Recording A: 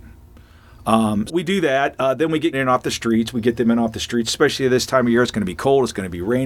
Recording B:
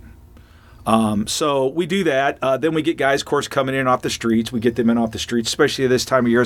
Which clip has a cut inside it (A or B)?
A